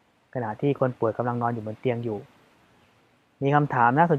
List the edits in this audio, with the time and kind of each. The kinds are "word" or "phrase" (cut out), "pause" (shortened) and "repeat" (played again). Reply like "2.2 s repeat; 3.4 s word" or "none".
none